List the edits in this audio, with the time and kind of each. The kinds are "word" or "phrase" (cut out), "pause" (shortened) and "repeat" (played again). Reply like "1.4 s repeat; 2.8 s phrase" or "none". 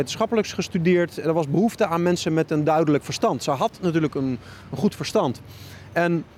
none